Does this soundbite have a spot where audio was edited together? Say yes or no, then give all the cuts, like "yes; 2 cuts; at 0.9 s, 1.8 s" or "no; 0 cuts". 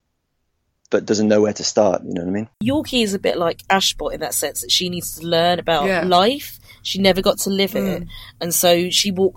yes; 1 cut; at 2.5 s